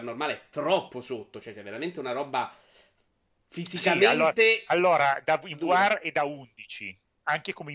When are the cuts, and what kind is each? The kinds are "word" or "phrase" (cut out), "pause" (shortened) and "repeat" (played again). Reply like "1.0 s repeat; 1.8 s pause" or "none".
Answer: none